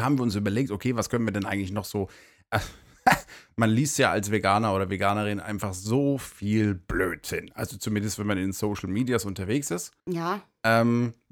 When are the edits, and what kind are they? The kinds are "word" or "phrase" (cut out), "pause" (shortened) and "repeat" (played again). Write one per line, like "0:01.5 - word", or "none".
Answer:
0:10.0 - pause